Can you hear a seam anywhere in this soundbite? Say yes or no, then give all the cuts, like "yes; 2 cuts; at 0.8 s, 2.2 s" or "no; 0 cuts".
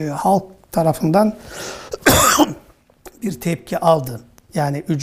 no; 0 cuts